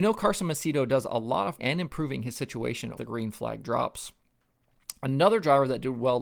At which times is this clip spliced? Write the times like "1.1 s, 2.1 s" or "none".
1.6 s, 3.0 s